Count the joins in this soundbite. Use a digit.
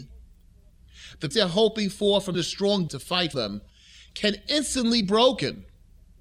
5